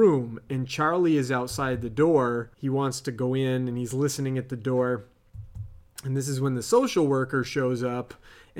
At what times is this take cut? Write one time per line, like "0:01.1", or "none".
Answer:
0:02.5
0:05.9